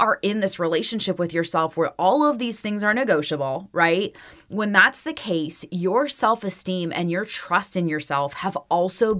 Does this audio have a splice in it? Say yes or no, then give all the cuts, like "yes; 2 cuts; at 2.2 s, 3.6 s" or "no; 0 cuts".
no; 0 cuts